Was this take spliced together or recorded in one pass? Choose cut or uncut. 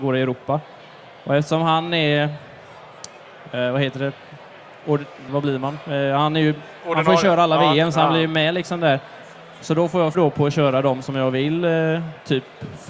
cut